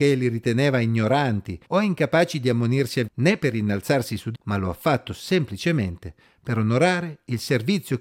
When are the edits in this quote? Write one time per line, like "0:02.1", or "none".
0:01.6
0:03.1
0:04.3